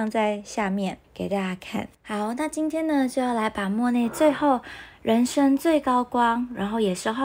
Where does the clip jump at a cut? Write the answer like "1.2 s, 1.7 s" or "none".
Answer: 1.0 s, 1.9 s